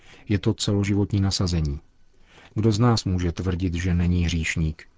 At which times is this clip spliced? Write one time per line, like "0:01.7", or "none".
none